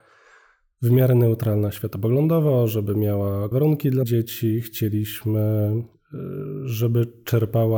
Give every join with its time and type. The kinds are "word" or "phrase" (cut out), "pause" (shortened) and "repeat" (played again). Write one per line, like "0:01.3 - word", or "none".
0:03.5 - word
0:04.0 - word